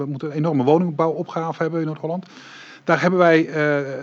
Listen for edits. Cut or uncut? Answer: uncut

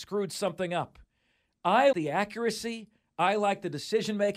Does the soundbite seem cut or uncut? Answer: cut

